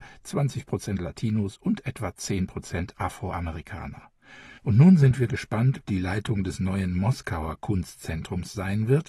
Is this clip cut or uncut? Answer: cut